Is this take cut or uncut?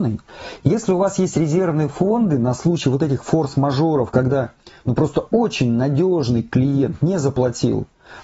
uncut